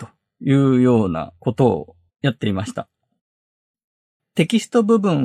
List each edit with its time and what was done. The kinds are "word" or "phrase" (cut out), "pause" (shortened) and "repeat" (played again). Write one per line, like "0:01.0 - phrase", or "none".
0:01.3 - pause
0:02.1 - pause